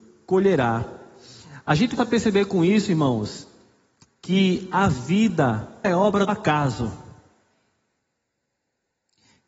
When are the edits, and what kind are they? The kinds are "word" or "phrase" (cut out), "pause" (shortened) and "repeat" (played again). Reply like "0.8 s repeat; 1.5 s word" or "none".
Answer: 2.0 s word; 5.8 s word; 6.3 s word